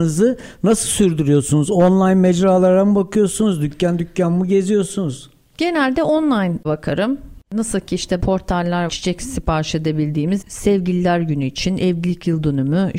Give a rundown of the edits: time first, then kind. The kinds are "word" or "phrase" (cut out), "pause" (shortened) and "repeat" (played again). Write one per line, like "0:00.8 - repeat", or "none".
0:06.6 - word
0:08.2 - word
0:08.9 - word
0:10.4 - word